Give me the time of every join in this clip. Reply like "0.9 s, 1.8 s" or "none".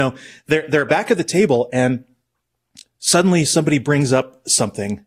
none